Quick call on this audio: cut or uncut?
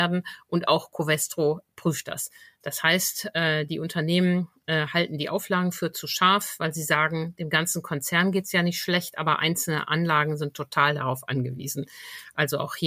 uncut